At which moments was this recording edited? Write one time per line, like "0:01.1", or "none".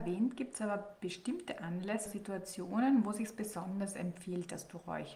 0:02.1